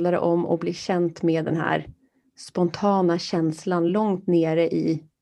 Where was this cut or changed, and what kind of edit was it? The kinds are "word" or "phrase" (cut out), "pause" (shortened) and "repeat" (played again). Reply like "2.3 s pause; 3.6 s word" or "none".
none